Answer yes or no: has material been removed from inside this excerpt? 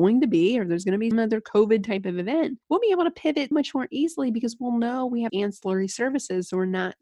yes